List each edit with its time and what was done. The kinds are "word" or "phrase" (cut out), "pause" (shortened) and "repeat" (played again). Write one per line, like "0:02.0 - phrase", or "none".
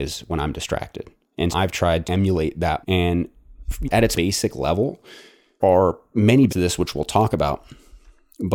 0:01.5 - word
0:02.0 - word
0:02.8 - word
0:03.8 - word
0:04.1 - word
0:05.6 - word
0:06.5 - word